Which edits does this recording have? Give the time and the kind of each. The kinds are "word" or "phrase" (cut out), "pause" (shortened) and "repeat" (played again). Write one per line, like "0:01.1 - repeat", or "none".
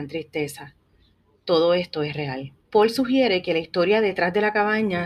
0:02.6 - pause